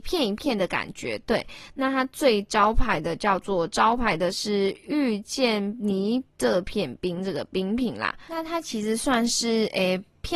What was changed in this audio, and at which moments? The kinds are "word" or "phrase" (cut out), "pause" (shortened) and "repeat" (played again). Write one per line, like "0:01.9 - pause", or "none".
0:06.3 - pause